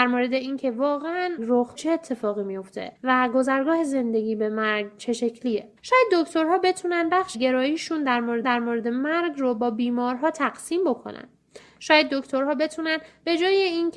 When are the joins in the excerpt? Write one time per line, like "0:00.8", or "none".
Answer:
0:01.4
0:01.8
0:03.0
0:05.8
0:07.3
0:08.4